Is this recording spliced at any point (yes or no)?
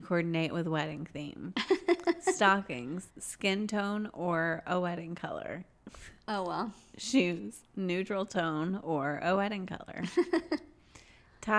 yes